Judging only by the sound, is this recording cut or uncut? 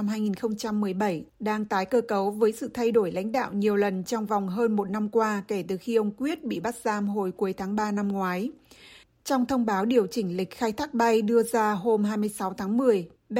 uncut